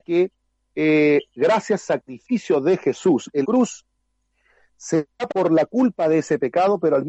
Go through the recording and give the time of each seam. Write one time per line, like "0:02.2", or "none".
0:01.8
0:03.4
0:05.3